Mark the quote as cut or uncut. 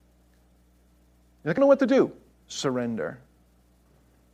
cut